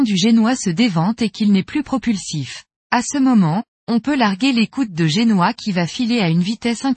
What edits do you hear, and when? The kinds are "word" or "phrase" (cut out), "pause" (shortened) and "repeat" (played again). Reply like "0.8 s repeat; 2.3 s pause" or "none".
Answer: 2.8 s pause